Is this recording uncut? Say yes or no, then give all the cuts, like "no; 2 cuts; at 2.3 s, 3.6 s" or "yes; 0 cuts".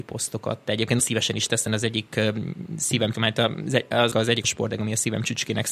no; 5 cuts; at 1.0 s, 1.7 s, 3.1 s, 4.1 s, 4.4 s